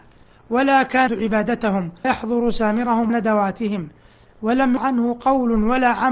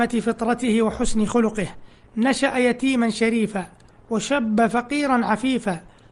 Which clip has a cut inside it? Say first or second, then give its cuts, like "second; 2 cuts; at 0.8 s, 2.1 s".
first; 4 cuts; at 1.1 s, 2.0 s, 3.1 s, 4.8 s